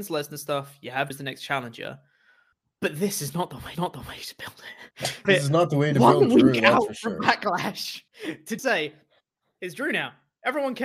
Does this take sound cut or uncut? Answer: cut